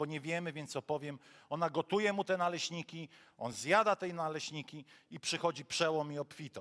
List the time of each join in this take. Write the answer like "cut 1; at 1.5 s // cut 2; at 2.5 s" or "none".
none